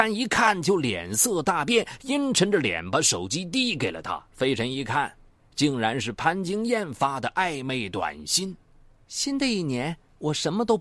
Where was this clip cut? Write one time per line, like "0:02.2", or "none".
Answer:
0:04.3